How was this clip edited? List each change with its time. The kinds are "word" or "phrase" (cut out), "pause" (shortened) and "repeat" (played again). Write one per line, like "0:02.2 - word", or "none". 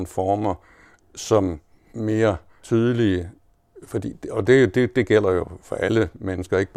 0:01.9 - word